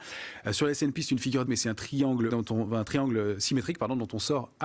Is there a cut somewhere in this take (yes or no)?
yes